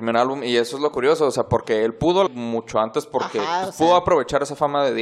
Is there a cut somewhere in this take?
yes; 1 cut; at 2.3 s

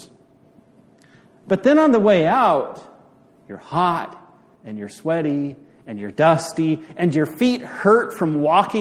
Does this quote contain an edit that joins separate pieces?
no; 0 cuts

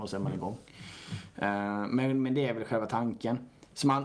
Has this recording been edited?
no; 0 cuts

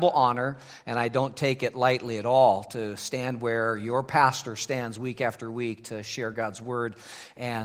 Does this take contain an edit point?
no; 0 cuts

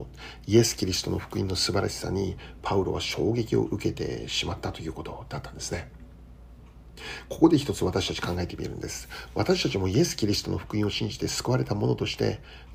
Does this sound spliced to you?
no; 0 cuts

